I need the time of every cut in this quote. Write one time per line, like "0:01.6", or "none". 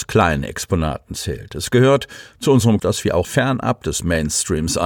0:02.8
0:03.2